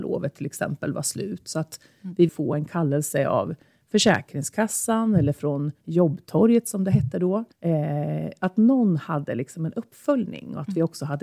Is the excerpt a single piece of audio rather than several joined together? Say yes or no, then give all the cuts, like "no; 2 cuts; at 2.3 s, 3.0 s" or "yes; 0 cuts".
no; 2 cuts; at 2.3 s, 7.5 s